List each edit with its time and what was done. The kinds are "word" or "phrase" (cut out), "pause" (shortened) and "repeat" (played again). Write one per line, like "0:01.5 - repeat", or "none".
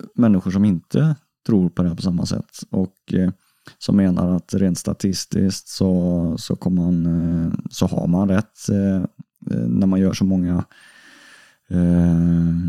none